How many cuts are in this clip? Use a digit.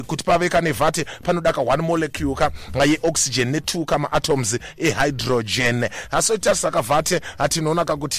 0